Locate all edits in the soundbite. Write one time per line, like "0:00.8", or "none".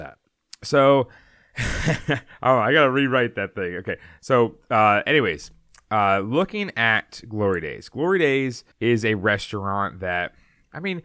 0:01.2
0:08.7